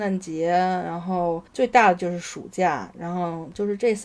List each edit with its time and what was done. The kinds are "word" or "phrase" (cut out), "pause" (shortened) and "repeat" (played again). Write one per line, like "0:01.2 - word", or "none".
0:01.5 - pause